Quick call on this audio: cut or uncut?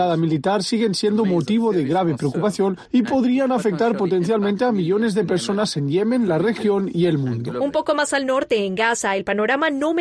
uncut